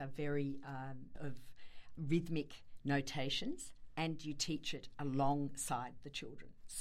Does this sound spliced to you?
yes; 2 cuts; at 1.2 s, 2.0 s

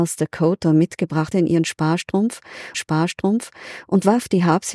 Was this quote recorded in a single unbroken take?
no; 2 cuts; at 1.3 s, 2.7 s

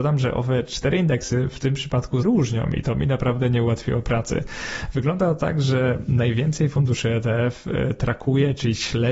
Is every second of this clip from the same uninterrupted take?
no; 1 cut; at 2.2 s

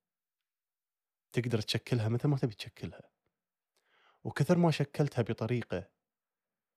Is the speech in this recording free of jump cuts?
yes; 0 cuts

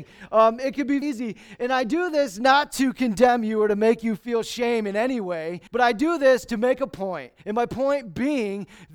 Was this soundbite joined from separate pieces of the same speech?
yes; 3 cuts; at 1.0 s, 5.7 s, 7.4 s

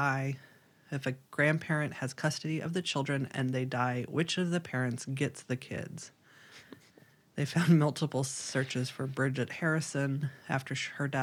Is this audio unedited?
yes; 0 cuts

